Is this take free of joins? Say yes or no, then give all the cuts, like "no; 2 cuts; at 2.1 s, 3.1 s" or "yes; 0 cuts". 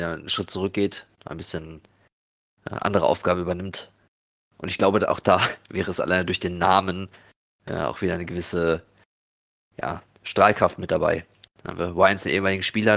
no; 1 cut; at 1.2 s